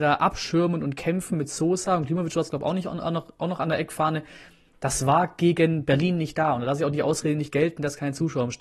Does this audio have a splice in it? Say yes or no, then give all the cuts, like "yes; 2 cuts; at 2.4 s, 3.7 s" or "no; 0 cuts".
no; 0 cuts